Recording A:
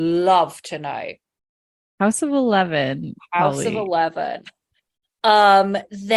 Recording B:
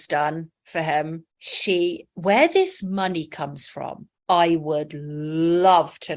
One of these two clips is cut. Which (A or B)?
B